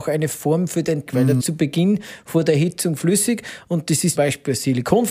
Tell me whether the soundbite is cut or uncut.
cut